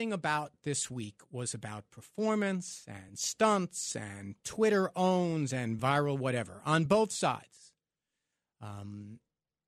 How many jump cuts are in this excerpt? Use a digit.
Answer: 0